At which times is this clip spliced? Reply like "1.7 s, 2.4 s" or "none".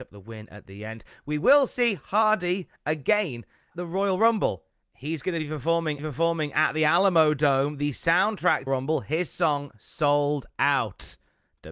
3.7 s, 4.8 s, 6.0 s, 8.7 s